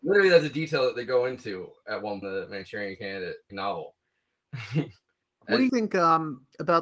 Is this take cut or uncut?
cut